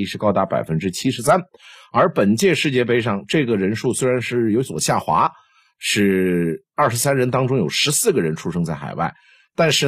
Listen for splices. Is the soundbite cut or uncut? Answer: uncut